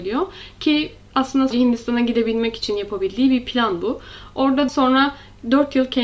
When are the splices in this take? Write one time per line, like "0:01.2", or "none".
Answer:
0:01.5
0:04.7